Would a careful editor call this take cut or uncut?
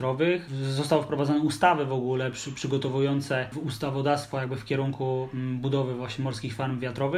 uncut